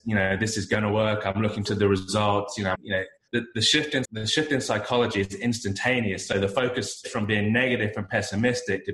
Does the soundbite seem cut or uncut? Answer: cut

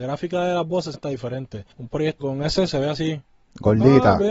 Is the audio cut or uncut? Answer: cut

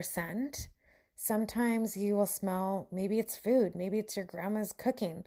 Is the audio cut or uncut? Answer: uncut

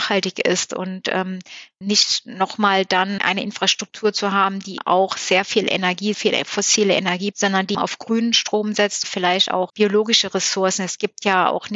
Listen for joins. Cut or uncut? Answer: cut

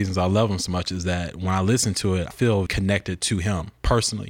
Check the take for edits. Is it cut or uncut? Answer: cut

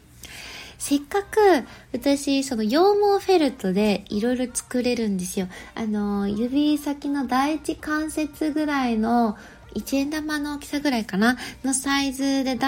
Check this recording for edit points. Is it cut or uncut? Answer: uncut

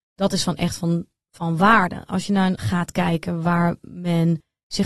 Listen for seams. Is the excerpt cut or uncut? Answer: cut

